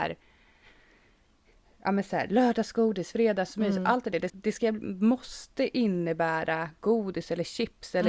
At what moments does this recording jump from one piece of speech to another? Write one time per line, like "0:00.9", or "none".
0:04.3